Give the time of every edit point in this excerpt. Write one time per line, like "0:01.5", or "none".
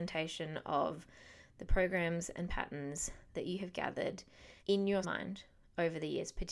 0:04.6
0:05.0